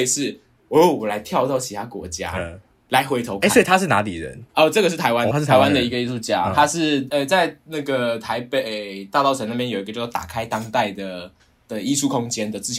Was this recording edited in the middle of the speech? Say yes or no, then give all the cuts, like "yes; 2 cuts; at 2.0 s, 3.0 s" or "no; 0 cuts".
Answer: yes; 1 cut; at 5.3 s